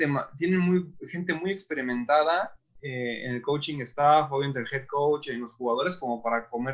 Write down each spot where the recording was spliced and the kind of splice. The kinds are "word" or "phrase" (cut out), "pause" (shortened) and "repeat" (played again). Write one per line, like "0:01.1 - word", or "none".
none